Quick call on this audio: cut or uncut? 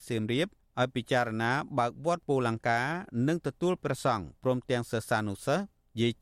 uncut